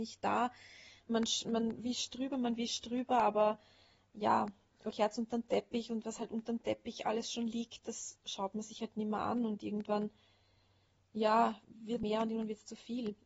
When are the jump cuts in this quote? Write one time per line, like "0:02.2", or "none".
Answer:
0:01.5
0:04.9
0:12.0

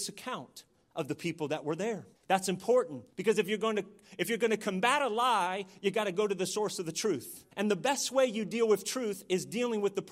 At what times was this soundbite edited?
0:02.2
0:03.1
0:07.5

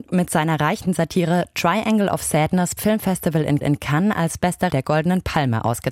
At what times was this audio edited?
0:02.8
0:03.6
0:04.7

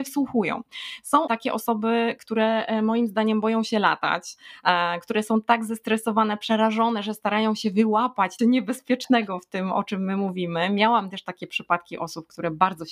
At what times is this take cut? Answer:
0:01.3
0:08.4

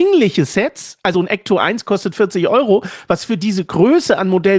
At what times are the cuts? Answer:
0:01.1

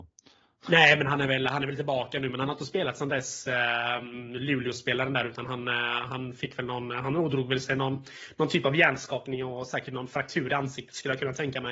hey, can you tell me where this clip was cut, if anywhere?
none

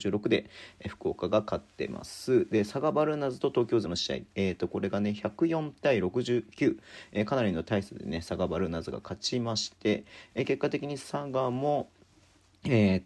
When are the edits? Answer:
0:03.8

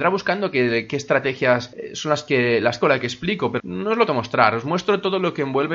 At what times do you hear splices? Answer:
0:02.8
0:03.6
0:04.1

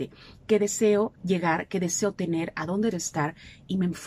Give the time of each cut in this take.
0:01.1
0:02.9

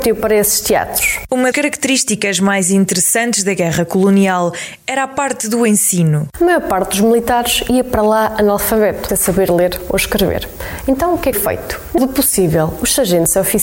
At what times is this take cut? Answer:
0:01.5
0:09.1
0:11.3
0:12.0

